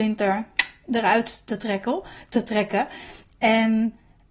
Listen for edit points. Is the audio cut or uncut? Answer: uncut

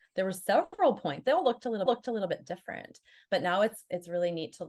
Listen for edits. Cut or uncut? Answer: cut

